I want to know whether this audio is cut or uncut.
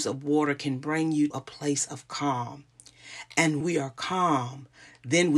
cut